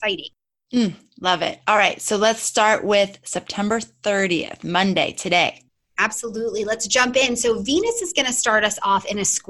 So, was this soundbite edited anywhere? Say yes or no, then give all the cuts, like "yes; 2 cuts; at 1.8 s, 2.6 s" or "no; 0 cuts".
no; 0 cuts